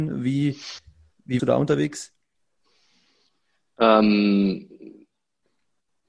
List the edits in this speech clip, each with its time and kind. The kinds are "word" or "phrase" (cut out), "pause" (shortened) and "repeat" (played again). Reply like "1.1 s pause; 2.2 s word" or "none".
1.4 s word